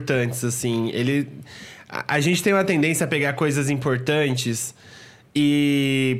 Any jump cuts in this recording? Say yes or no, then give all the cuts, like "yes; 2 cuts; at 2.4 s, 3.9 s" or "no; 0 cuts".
no; 0 cuts